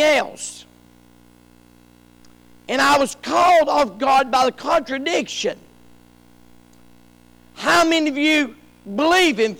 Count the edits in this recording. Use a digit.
0